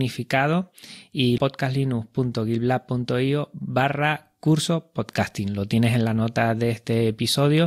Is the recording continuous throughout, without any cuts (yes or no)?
no